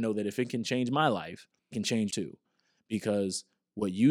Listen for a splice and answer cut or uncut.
cut